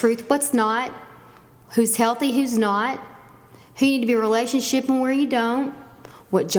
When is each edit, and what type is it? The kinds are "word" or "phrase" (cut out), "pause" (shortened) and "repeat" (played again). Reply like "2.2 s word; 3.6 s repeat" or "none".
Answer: none